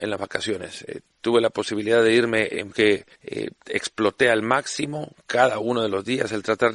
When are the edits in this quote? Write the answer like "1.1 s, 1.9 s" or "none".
2.7 s, 3.1 s